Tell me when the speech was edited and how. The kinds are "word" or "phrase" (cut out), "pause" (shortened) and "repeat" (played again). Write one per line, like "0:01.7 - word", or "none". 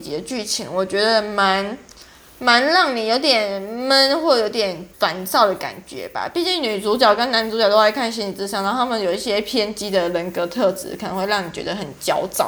0:04.9 - pause